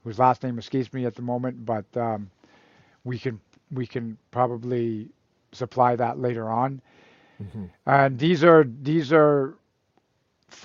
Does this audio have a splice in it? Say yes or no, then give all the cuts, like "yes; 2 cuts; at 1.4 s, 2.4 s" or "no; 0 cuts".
no; 0 cuts